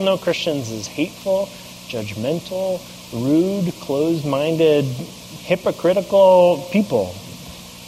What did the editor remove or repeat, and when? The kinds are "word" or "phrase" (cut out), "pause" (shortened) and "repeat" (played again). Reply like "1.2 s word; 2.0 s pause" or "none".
none